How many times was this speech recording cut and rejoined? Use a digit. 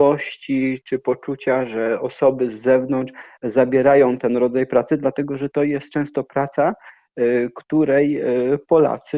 0